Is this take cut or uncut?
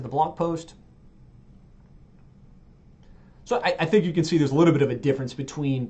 uncut